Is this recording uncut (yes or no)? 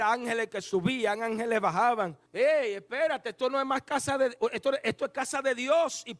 no